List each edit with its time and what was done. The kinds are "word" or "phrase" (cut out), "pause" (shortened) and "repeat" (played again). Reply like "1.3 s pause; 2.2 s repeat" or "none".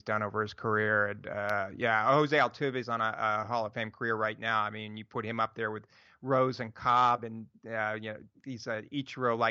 none

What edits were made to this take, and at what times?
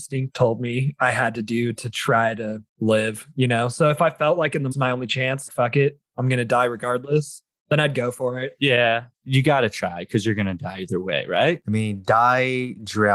2.7 s pause; 4.7 s phrase; 5.5 s word

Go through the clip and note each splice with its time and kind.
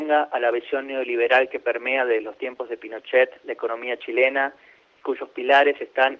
none

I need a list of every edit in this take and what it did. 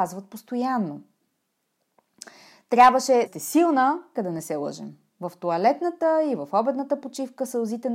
3.3 s word; 4.2 s phrase

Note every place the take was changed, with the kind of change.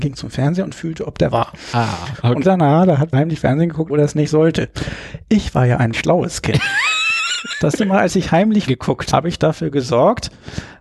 1.3 s word; 2.4 s word; 3.1 s word; 3.9 s word; 5.9 s word; 7.8 s word; 8.7 s word; 9.1 s word

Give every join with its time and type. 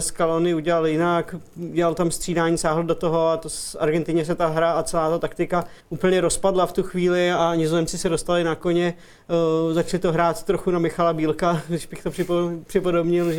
5.8 s pause

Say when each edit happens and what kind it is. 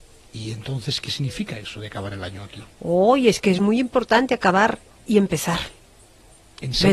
none

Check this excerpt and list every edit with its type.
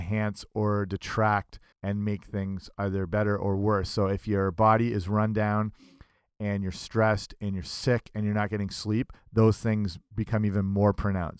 1.7 s pause

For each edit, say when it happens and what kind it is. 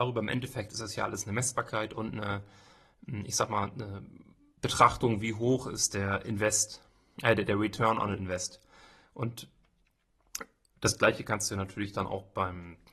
none

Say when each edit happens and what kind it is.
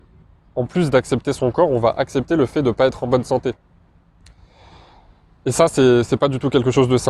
none

